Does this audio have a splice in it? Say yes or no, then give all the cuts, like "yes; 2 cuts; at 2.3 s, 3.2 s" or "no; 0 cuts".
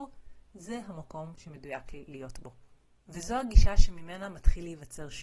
no; 0 cuts